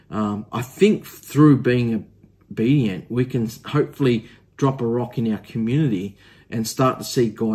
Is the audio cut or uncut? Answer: uncut